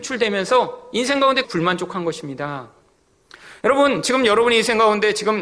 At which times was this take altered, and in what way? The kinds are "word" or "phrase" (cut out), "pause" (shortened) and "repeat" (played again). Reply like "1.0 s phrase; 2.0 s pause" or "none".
1.4 s word